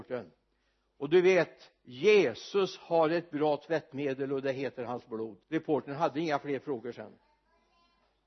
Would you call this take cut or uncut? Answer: cut